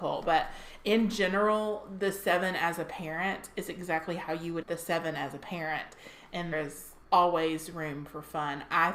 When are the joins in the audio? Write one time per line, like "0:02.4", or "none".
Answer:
0:04.6
0:06.5
0:07.0